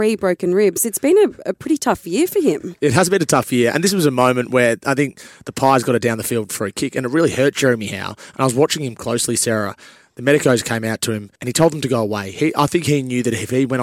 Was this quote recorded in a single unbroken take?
no; 1 cut; at 11.4 s

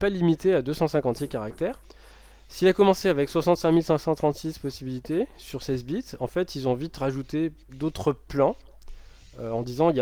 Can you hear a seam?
yes; 1 cut; at 7.6 s

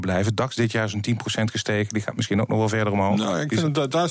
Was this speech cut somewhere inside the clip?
no; 0 cuts

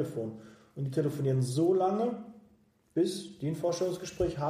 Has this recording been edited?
no; 0 cuts

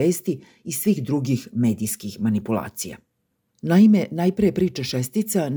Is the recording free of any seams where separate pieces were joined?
yes; 0 cuts

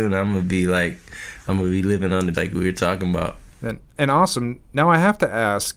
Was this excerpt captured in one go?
no; 1 cut; at 2.3 s

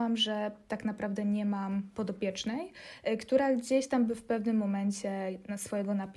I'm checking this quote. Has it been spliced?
no; 0 cuts

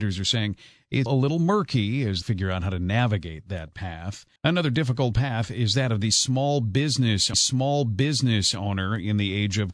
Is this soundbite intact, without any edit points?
no; 4 cuts; at 1.1 s, 2.2 s, 4.4 s, 7.3 s

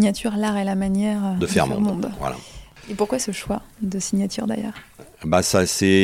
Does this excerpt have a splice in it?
no; 0 cuts

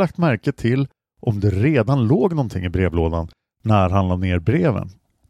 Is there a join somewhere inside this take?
no; 0 cuts

